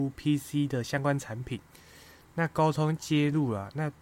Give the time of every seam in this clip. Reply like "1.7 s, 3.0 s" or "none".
none